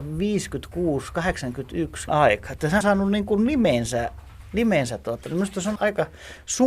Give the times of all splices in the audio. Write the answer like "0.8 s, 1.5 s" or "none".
2.1 s, 2.8 s, 5.8 s